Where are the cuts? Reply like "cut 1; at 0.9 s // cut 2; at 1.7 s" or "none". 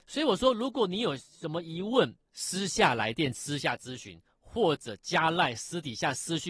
cut 1; at 2.2 s